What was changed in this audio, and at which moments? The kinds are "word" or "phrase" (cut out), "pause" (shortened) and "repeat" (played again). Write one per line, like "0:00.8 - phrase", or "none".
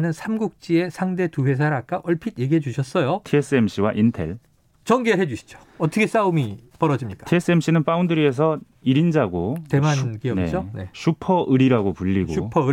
none